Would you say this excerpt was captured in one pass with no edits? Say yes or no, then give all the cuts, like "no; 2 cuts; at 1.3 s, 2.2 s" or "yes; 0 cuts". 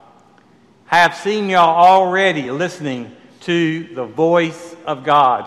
yes; 0 cuts